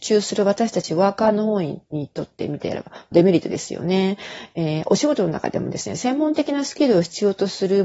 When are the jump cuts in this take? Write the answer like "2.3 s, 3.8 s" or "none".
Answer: 1.8 s, 3.1 s